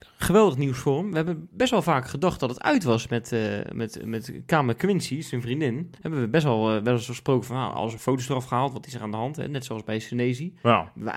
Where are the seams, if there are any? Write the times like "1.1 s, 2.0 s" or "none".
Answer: 5.9 s